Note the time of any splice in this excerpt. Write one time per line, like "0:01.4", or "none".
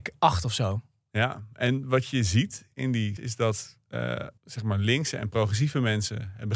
0:03.2
0:04.4